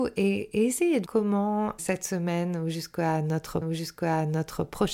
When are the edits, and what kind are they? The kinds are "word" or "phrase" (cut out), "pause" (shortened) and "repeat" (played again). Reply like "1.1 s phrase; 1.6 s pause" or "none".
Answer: 1.1 s word; 1.8 s word; 3.6 s repeat